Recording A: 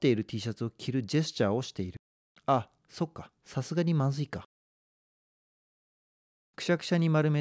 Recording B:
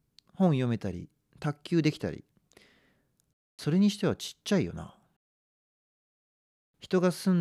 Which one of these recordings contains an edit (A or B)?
A